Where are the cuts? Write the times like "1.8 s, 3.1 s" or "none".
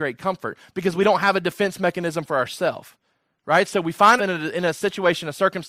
4.2 s